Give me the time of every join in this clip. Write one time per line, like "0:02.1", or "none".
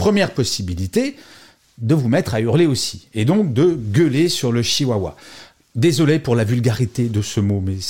none